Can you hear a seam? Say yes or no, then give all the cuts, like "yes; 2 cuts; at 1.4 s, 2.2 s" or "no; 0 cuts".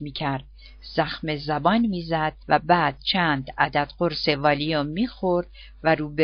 yes; 1 cut; at 2.4 s